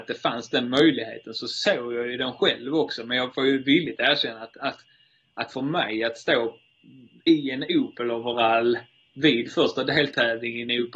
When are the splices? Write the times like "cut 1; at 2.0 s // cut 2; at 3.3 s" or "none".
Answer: none